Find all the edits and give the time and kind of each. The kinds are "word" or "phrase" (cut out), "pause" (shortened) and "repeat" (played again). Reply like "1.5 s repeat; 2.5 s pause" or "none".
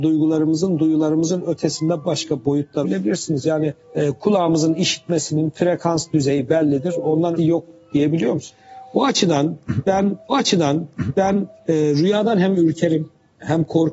2.0 s word; 2.8 s phrase; 7.4 s word; 10.3 s repeat